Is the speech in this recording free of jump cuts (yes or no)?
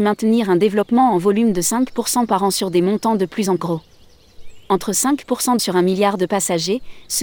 no